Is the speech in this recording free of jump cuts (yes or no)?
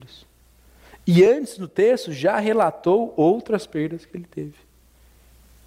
yes